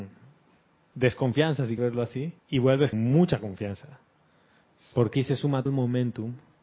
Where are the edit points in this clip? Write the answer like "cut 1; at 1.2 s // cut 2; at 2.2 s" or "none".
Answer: cut 1; at 1.8 s // cut 2; at 2.4 s // cut 3; at 2.9 s // cut 4; at 5.1 s // cut 5; at 5.7 s